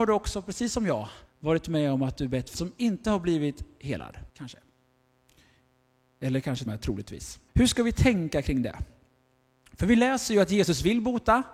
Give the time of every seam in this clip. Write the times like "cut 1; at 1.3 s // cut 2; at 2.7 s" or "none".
cut 1; at 1.3 s // cut 2; at 2.5 s // cut 3; at 4.3 s // cut 4; at 6.7 s // cut 5; at 7.5 s